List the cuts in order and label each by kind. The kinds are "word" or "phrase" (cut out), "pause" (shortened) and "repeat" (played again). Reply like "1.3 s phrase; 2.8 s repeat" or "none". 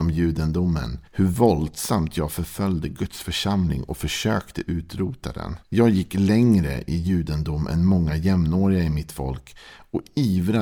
1.1 s pause; 5.6 s pause

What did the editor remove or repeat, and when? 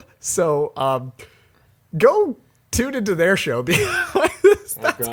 none

